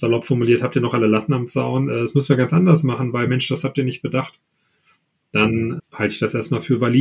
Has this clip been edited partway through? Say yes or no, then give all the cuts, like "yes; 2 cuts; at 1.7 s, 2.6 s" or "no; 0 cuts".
yes; 1 cut; at 5.8 s